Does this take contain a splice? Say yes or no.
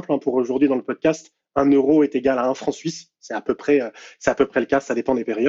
no